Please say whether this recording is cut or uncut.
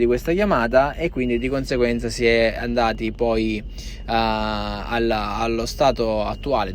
uncut